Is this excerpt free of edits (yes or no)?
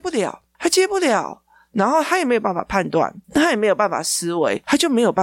yes